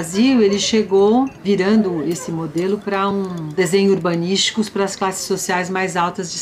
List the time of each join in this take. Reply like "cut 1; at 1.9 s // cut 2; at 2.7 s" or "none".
none